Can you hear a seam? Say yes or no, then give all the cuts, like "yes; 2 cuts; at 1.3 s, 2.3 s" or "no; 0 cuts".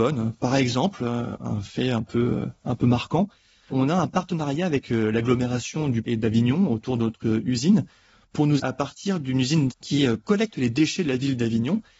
yes; 3 cuts; at 6.0 s, 8.6 s, 9.7 s